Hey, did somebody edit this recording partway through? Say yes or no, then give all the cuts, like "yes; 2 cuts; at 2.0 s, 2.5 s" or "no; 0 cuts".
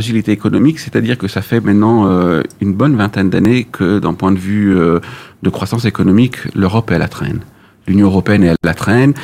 no; 0 cuts